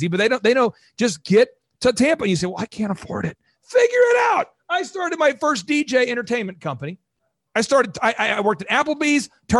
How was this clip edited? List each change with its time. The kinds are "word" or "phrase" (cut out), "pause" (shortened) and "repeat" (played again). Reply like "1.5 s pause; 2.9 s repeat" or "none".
none